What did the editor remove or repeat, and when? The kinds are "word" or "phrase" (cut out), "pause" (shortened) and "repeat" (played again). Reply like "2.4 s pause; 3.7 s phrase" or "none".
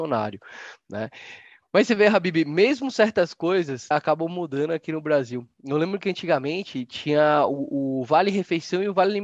3.9 s word